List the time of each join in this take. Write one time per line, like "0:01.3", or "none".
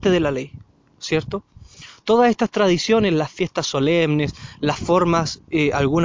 none